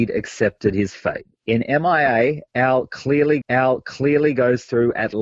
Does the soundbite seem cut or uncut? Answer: cut